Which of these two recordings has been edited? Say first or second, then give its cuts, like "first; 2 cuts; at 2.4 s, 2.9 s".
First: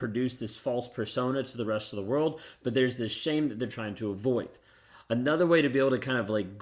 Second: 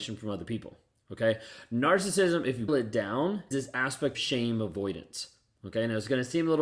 second; 3 cuts; at 2.7 s, 3.5 s, 4.1 s